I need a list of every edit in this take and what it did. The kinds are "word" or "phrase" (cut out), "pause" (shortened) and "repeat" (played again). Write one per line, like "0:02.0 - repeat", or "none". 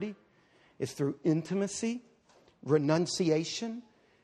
none